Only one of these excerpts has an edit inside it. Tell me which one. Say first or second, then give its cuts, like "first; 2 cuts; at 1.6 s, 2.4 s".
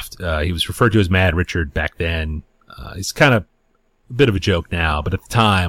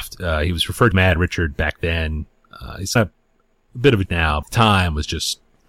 second; 4 cuts; at 0.9 s, 3.0 s, 4.1 s, 4.4 s